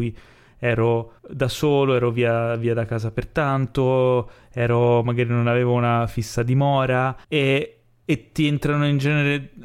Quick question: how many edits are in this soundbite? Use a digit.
2